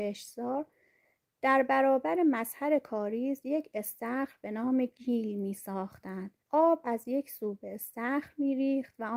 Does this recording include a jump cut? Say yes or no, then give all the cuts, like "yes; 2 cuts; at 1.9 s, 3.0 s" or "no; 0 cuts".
yes; 1 cut; at 6.4 s